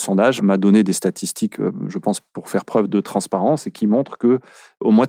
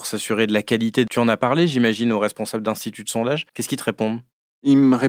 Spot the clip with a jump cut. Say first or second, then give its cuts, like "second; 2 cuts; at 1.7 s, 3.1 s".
second; 2 cuts; at 1.1 s, 3.5 s